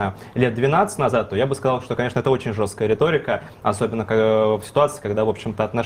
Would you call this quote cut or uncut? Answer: uncut